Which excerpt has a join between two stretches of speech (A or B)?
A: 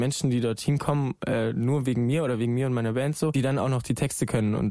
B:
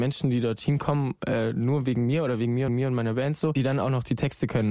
B